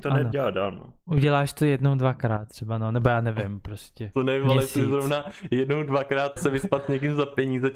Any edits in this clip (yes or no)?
yes